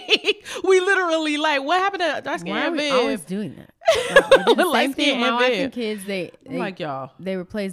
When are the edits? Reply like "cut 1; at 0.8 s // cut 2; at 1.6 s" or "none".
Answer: none